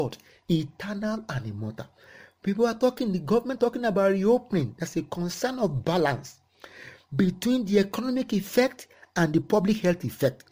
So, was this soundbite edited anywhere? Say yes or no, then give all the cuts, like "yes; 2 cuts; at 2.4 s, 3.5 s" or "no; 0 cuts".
yes; 1 cut; at 3.6 s